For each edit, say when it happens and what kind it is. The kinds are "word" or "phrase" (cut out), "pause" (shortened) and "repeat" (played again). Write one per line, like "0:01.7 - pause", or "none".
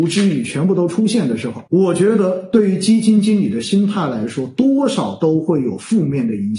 0:01.7 - pause

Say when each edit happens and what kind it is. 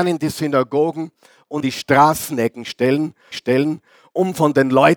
0:01.6 - word
0:03.3 - repeat

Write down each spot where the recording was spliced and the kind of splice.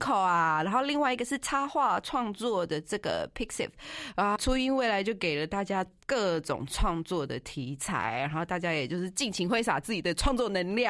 0:04.4 - word

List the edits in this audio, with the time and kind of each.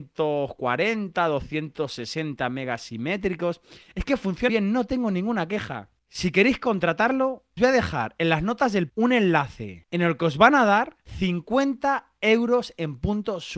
0:04.5 - word
0:07.6 - word
0:08.9 - word

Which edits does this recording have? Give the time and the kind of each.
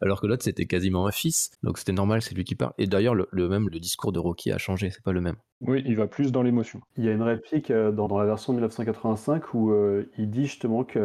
0:01.5 - pause
0:03.7 - word
0:08.1 - word

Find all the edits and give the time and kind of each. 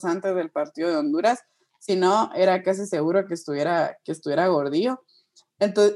none

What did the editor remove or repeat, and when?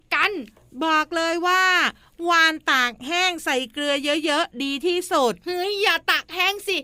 none

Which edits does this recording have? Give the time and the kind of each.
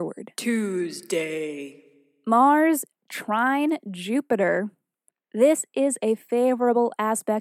none

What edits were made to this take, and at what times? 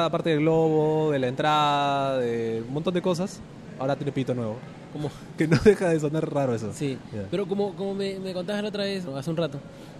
0:09.1 - word

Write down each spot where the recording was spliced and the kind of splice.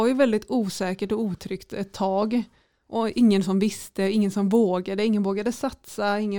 none

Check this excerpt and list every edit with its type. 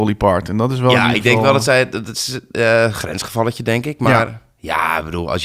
none

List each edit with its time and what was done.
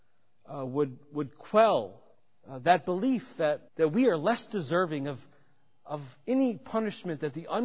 0:02.1 - pause
0:03.7 - pause

